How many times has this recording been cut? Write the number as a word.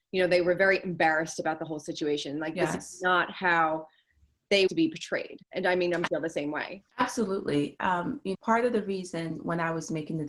five